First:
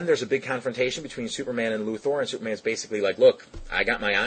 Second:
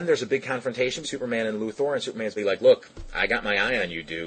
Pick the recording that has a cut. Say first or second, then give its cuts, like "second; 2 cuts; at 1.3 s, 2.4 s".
second; 2 cuts; at 1.0 s, 2.4 s